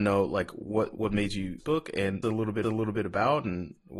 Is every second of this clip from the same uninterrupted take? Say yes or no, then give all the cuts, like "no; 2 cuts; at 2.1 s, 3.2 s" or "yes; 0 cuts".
no; 3 cuts; at 1.6 s, 2.2 s, 2.6 s